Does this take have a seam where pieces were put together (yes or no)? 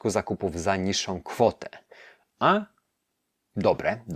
no